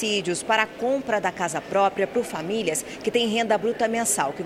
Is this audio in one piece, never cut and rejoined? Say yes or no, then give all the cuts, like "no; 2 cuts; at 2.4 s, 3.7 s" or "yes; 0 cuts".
yes; 0 cuts